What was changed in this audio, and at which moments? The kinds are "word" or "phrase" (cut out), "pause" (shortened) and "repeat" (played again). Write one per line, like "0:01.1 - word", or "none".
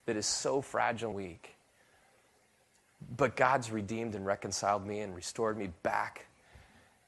0:01.1 - word